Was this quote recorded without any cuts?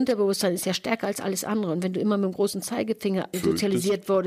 yes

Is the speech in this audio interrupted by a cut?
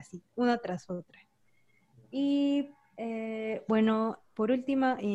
no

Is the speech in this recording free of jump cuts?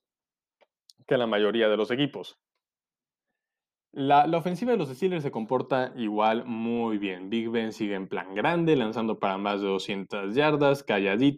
yes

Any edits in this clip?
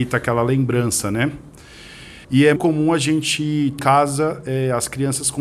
yes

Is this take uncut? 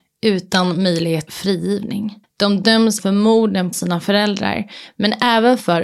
no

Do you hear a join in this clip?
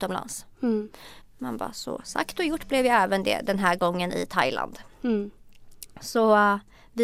yes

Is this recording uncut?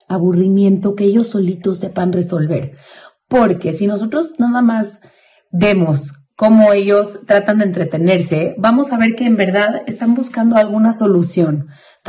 yes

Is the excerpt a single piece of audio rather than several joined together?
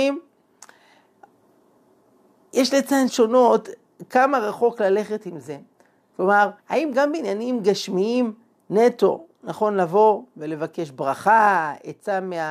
no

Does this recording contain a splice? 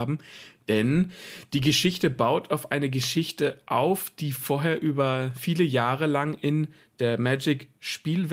no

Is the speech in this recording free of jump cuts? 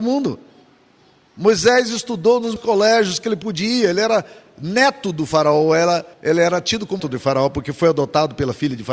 no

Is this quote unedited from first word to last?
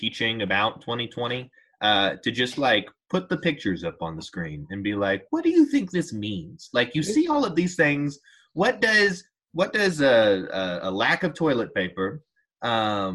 yes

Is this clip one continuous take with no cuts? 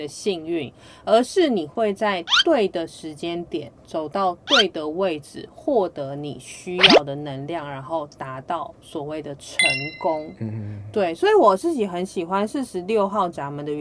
yes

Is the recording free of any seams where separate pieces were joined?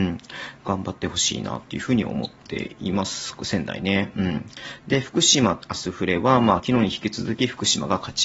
yes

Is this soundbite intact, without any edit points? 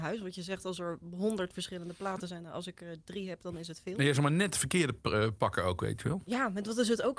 yes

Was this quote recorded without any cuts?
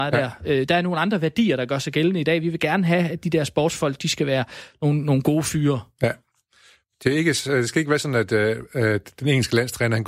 yes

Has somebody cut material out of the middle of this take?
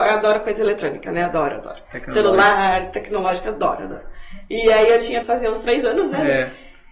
yes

